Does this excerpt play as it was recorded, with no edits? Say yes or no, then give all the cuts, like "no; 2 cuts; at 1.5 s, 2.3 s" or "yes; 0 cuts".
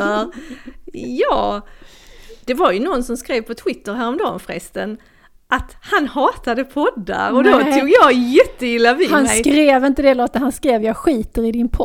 yes; 0 cuts